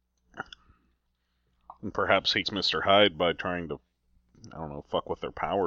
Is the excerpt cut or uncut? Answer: cut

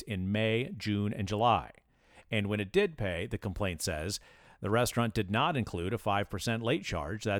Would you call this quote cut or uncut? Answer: uncut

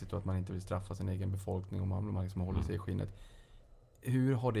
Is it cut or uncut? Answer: uncut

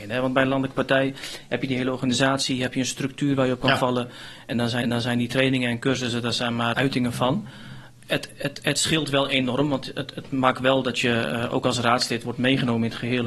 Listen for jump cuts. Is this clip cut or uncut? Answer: cut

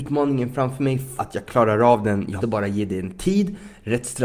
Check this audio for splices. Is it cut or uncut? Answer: cut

